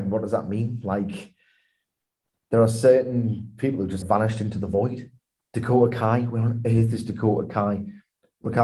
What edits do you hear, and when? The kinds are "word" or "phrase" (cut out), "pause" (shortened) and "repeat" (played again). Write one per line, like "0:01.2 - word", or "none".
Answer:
0:04.0 - word